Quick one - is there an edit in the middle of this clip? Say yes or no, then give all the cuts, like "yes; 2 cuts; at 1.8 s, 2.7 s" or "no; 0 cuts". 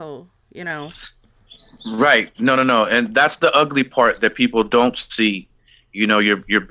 no; 0 cuts